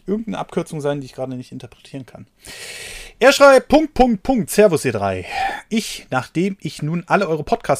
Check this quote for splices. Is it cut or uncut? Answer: uncut